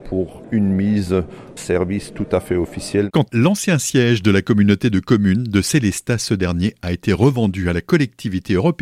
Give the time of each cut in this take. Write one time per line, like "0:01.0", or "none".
0:01.6
0:03.3